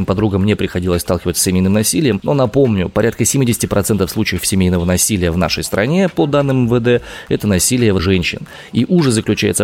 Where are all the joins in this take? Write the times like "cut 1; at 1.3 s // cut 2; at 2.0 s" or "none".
cut 1; at 8.0 s

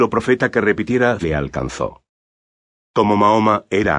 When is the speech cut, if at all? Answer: cut 1; at 1.2 s

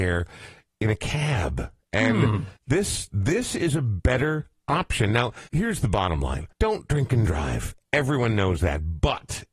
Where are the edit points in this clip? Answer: cut 1; at 2.6 s // cut 2; at 5.5 s // cut 3; at 6.5 s

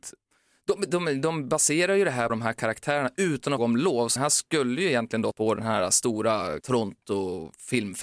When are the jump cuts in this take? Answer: cut 1; at 2.3 s // cut 2; at 3.6 s // cut 3; at 4.2 s // cut 4; at 5.3 s // cut 5; at 6.6 s

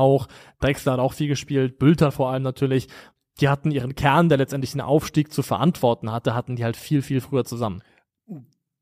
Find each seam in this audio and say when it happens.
none

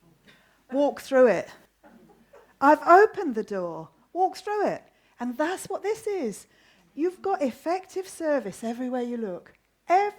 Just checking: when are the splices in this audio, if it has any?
none

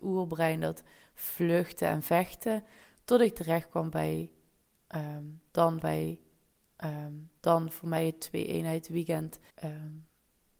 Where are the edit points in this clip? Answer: cut 1; at 5.8 s // cut 2; at 9.5 s

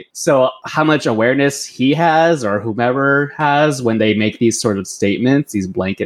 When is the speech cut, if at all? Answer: none

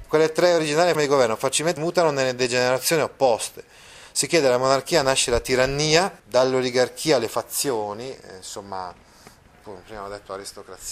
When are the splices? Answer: cut 1; at 0.9 s // cut 2; at 1.8 s // cut 3; at 6.2 s

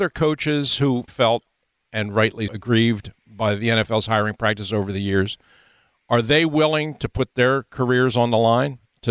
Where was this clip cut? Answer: cut 1; at 1.1 s // cut 2; at 2.5 s

